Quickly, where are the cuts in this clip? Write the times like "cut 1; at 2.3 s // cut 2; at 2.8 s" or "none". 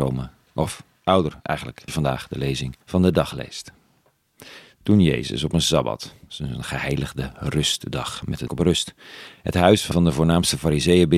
cut 1; at 1.9 s // cut 2; at 2.8 s // cut 3; at 8.5 s // cut 4; at 9.9 s

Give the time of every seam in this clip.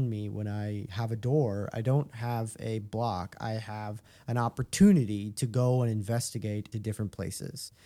cut 1; at 6.7 s

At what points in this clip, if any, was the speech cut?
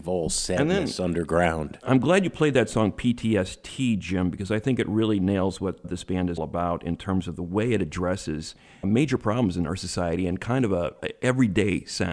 cut 1; at 5.8 s // cut 2; at 6.4 s // cut 3; at 8.8 s

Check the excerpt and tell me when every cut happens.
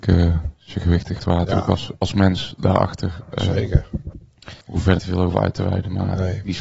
cut 1; at 1.2 s // cut 2; at 4.6 s // cut 3; at 5.0 s

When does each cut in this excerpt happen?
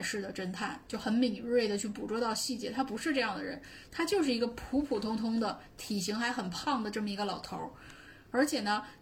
none

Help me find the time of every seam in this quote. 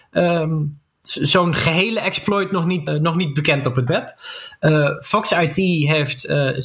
cut 1; at 2.9 s // cut 2; at 3.9 s

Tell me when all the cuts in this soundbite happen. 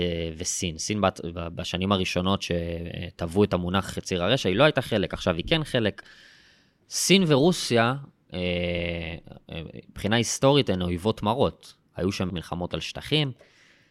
cut 1; at 12.3 s

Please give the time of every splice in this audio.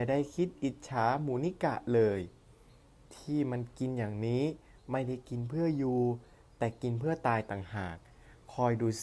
none

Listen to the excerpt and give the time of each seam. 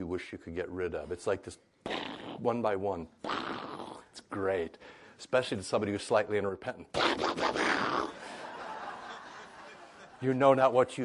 none

